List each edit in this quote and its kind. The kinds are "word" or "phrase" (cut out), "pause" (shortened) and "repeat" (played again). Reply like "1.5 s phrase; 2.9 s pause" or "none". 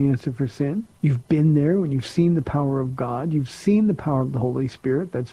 1.0 s pause